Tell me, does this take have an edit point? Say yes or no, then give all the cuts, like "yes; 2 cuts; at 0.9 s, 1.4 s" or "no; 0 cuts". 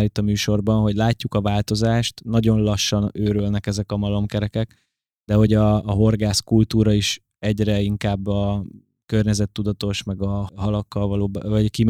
no; 0 cuts